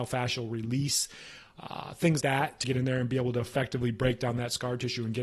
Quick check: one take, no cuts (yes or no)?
no